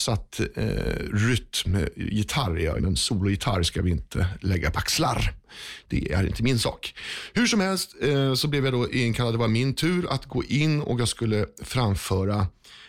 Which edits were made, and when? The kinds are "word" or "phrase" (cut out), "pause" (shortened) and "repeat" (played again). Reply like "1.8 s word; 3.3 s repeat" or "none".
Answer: 2.8 s word; 4.7 s word